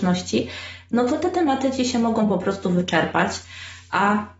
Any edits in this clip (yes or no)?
no